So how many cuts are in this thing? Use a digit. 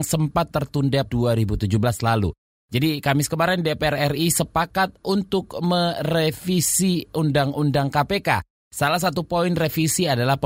1